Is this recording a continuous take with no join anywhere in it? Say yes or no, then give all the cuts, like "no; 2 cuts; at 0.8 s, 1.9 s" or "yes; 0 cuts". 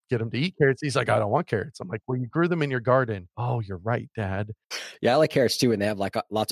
yes; 0 cuts